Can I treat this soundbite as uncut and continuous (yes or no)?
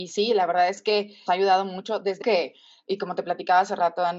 no